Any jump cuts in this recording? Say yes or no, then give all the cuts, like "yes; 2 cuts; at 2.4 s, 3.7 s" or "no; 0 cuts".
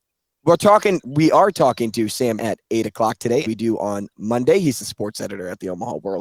yes; 3 cuts; at 1.0 s, 2.4 s, 3.4 s